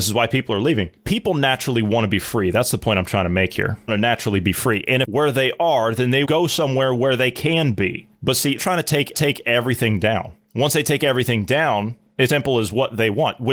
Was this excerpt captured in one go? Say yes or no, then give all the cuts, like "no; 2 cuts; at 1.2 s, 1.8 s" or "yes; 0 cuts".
no; 6 cuts; at 3.9 s, 5.0 s, 6.2 s, 8.6 s, 9.1 s, 12.3 s